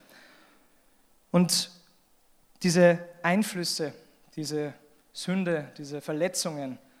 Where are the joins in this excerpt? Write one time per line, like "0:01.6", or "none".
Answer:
none